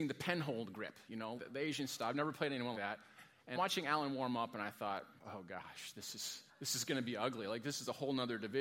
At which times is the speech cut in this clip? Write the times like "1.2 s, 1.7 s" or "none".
1.4 s, 2.7 s, 3.5 s, 5.2 s, 6.5 s